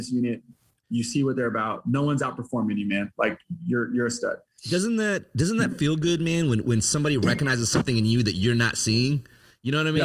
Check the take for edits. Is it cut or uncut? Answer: uncut